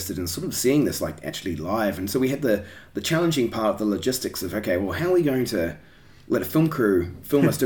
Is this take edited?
no; 0 cuts

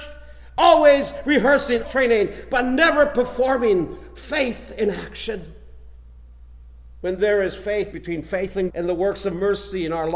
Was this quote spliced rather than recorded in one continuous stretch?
yes; 3 cuts; at 1.8 s, 7.9 s, 8.7 s

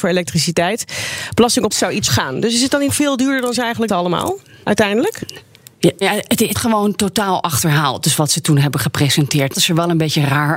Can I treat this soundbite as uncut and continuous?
no; 7 cuts; at 1.7 s, 2.1 s, 2.9 s, 3.9 s, 6.0 s, 6.5 s, 9.5 s

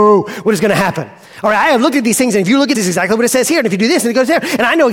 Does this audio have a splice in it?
yes; 1 cut; at 2.7 s

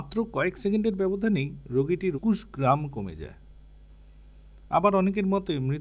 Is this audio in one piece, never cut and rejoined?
no; 1 cut; at 2.1 s

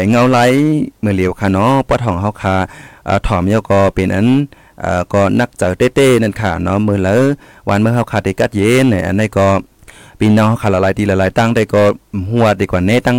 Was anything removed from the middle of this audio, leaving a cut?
yes; 1 cut; at 9.8 s

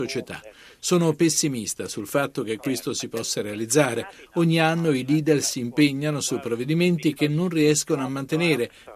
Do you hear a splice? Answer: no; 0 cuts

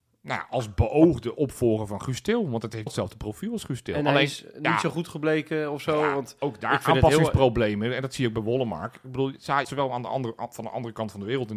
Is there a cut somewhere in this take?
yes; 2 cuts; at 2.9 s, 9.6 s

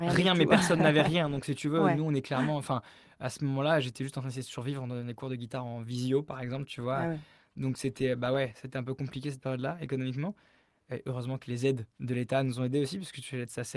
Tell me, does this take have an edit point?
no; 0 cuts

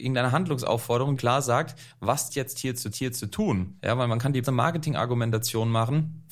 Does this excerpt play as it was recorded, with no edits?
no; 4 cuts; at 1.2 s, 2.3 s, 2.9 s, 4.4 s

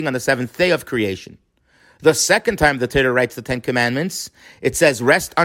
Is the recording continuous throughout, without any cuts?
yes; 0 cuts

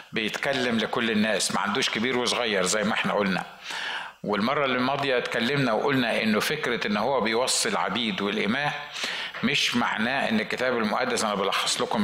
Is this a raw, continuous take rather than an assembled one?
yes; 0 cuts

